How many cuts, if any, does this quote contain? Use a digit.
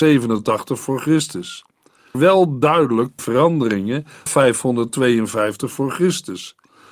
3